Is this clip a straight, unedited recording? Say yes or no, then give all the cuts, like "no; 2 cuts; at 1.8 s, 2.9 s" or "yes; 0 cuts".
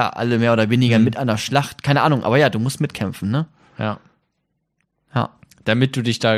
yes; 0 cuts